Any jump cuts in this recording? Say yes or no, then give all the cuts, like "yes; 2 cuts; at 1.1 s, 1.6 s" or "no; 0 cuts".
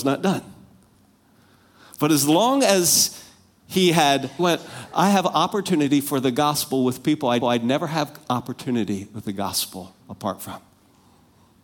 yes; 3 cuts; at 4.4 s, 7.4 s, 10.0 s